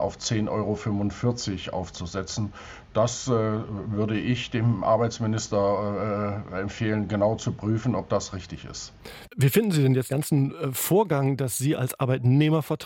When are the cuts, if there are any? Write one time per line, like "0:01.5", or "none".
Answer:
0:10.1